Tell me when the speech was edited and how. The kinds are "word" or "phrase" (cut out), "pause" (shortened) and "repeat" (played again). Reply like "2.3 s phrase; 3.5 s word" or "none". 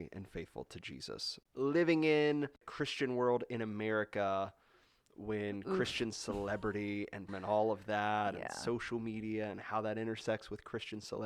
7.3 s word